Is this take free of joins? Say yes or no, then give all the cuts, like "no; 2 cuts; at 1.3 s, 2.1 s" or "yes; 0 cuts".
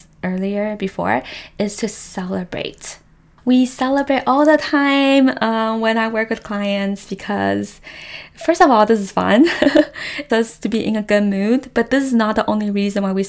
no; 1 cut; at 10.3 s